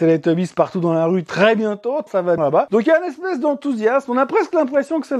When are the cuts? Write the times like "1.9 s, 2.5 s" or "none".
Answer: 2.1 s, 2.4 s